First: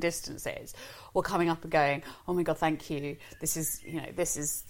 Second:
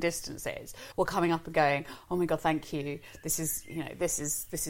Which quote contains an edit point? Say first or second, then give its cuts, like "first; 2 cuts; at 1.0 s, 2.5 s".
second; 1 cut; at 0.9 s